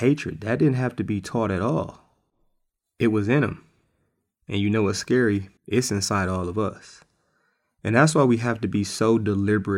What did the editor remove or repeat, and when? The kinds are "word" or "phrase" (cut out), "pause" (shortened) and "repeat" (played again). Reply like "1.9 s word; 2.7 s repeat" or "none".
5.6 s pause